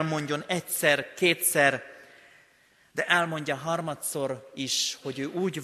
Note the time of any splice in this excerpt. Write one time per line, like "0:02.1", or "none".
none